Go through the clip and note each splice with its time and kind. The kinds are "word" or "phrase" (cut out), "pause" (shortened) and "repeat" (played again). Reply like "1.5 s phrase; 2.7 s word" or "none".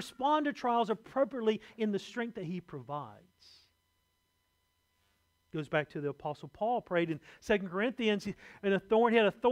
none